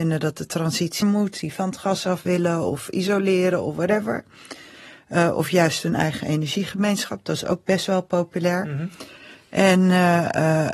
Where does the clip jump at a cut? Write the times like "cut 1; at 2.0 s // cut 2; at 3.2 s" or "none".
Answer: cut 1; at 1.0 s